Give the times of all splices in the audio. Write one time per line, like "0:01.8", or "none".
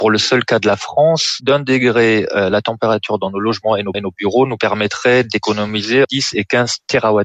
0:01.4
0:03.9
0:06.0